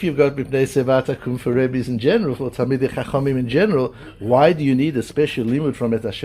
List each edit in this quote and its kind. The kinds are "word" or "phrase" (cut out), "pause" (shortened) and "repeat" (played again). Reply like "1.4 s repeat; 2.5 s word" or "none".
none